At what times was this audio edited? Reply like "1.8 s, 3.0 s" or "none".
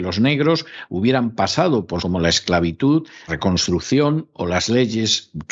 2.0 s, 3.3 s